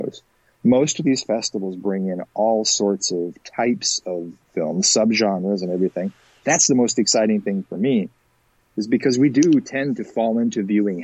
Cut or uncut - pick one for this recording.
uncut